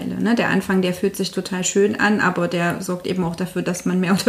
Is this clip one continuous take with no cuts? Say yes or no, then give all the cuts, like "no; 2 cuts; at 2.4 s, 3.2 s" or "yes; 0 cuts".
yes; 0 cuts